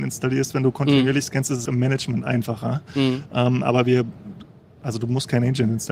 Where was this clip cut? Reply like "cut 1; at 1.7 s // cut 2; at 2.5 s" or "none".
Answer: cut 1; at 1.7 s